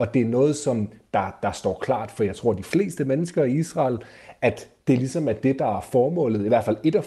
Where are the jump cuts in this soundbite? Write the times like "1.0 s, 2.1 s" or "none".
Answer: none